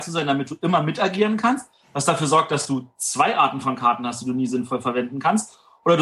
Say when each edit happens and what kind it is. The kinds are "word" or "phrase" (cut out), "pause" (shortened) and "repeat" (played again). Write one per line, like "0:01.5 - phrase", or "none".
none